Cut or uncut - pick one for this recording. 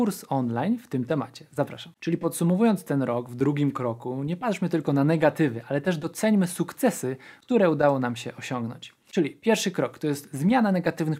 uncut